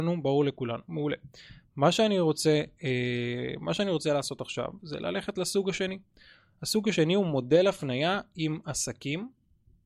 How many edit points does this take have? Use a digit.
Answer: 0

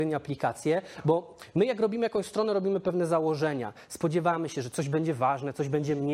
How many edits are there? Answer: 0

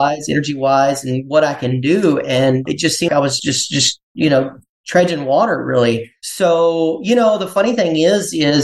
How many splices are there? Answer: 3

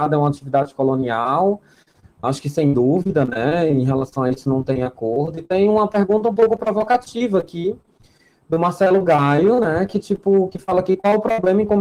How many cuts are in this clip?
0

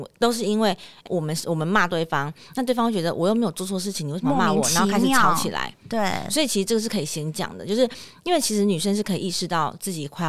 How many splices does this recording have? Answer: 1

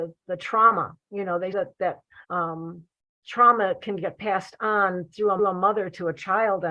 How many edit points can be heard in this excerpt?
3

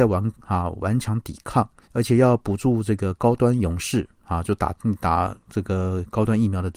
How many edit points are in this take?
1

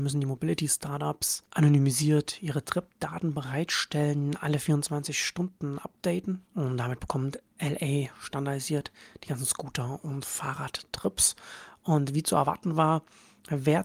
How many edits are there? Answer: 1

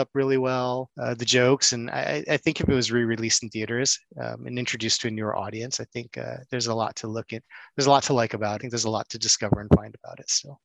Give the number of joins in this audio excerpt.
2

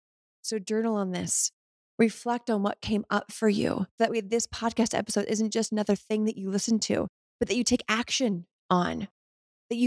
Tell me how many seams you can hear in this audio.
1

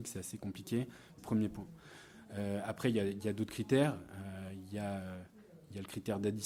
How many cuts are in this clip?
1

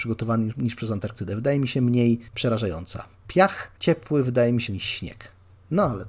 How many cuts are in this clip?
3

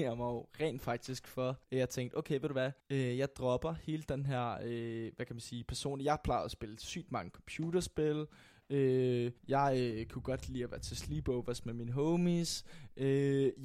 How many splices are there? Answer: 3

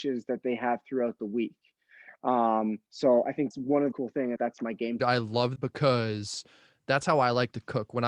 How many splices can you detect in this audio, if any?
6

